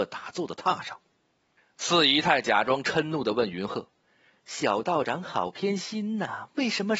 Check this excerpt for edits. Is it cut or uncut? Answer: uncut